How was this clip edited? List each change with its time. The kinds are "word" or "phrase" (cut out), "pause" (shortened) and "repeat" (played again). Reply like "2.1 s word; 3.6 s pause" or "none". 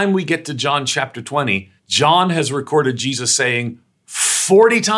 1.8 s pause